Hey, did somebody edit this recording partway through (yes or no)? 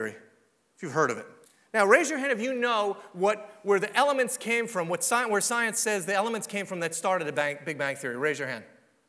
yes